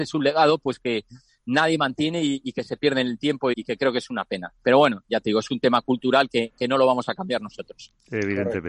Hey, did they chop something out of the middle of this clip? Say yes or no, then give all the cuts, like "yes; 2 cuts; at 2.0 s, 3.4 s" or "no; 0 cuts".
yes; 1 cut; at 3.5 s